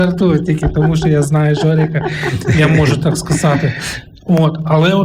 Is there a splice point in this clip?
no; 0 cuts

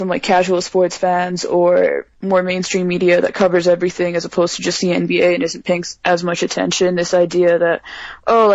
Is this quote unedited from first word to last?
yes; 0 cuts

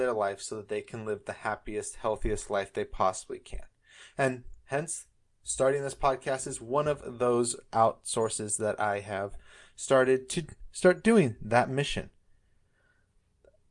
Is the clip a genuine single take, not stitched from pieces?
yes; 0 cuts

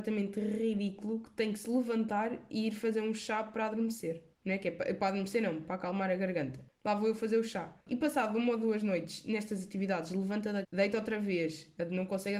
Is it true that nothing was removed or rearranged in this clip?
no; 4 cuts; at 4.3 s, 5.6 s, 7.8 s, 10.6 s

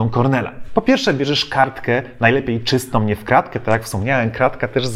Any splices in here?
no; 0 cuts

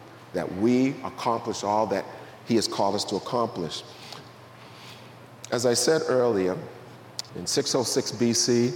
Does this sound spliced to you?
yes; 1 cut; at 7.3 s

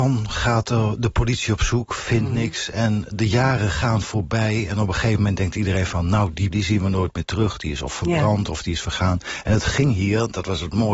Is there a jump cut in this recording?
yes; 1 cut; at 6.5 s

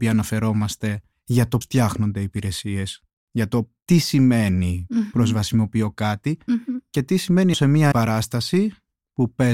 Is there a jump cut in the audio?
yes; 5 cuts; at 1.1 s, 1.6 s, 3.8 s, 7.5 s, 7.9 s

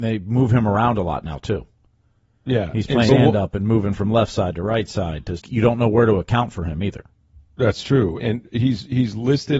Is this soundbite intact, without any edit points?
no; 3 cuts; at 3.1 s, 5.4 s, 8.2 s

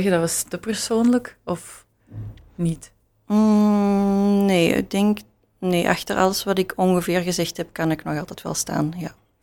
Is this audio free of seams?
yes; 0 cuts

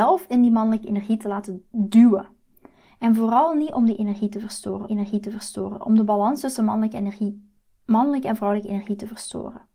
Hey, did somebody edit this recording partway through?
yes; 2 cuts; at 1.7 s, 4.9 s

